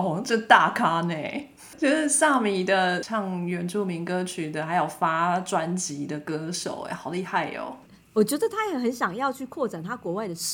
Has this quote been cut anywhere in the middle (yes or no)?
no